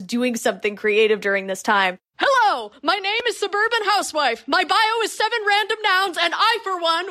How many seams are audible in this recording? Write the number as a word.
zero